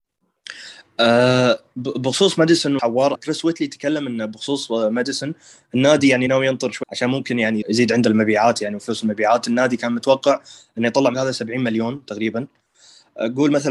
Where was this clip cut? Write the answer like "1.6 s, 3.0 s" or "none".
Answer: 2.8 s, 3.1 s, 6.3 s, 6.8 s, 7.6 s, 11.1 s